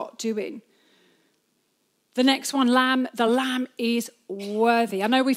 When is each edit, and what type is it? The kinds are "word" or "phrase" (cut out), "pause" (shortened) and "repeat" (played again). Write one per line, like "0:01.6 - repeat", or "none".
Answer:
none